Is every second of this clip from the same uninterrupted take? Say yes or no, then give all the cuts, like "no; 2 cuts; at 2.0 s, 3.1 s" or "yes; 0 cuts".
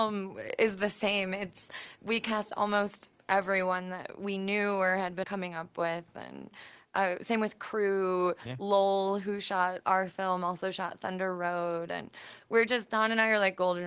no; 2 cuts; at 2.0 s, 5.2 s